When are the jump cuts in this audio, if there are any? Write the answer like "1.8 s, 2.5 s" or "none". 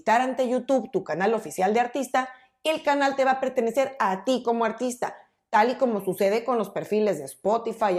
none